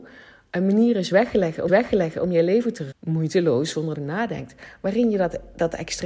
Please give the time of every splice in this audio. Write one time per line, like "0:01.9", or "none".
0:01.7
0:02.9
0:03.9